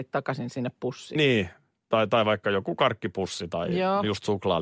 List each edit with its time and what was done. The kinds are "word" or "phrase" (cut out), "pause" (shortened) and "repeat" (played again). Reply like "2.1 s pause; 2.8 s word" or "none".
none